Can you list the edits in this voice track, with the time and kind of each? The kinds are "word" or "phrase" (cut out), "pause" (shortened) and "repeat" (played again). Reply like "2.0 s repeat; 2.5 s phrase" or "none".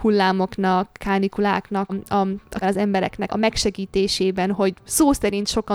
1.9 s word; 2.6 s word; 3.3 s word